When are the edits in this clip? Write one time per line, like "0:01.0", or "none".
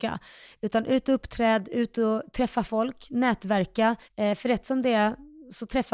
0:04.0